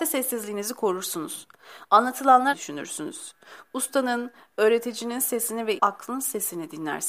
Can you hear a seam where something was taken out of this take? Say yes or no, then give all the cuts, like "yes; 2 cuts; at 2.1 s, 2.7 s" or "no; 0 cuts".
yes; 2 cuts; at 2.5 s, 5.8 s